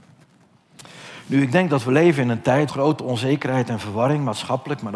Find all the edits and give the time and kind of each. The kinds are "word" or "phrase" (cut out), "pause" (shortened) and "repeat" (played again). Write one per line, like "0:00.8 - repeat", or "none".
0:02.7 - word